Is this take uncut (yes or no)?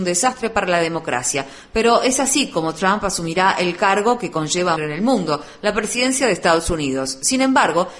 no